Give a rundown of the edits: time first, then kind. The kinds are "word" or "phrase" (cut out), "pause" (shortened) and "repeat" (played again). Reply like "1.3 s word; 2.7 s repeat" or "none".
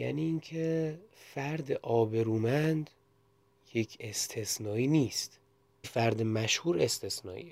4.0 s word; 5.8 s word